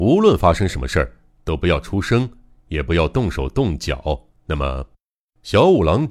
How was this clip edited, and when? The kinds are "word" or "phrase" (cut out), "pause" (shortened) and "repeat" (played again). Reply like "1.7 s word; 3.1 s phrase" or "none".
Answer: 4.4 s pause